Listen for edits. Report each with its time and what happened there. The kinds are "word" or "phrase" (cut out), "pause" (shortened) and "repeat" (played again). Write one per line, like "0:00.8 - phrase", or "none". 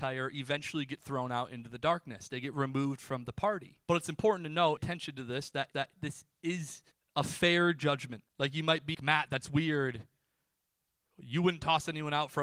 0:03.8 - pause
0:04.8 - phrase
0:05.7 - repeat
0:06.9 - pause
0:08.3 - pause
0:08.9 - word